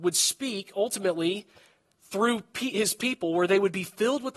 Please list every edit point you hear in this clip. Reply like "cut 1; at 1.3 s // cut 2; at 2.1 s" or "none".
none